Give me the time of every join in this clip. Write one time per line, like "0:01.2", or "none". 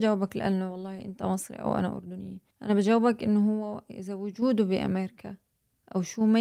0:02.5